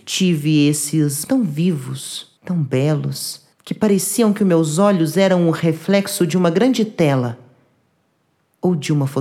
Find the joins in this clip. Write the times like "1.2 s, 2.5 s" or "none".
1.2 s, 2.4 s, 3.5 s